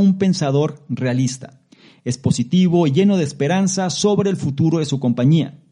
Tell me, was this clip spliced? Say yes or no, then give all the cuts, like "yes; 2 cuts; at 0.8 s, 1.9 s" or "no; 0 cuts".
no; 0 cuts